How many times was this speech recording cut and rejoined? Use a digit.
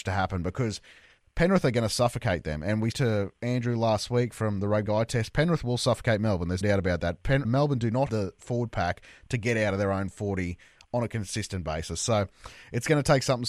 5